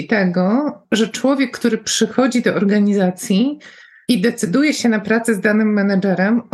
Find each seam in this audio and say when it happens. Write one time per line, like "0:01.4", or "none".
none